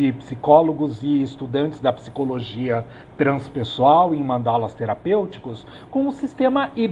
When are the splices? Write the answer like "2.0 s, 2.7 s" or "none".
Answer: none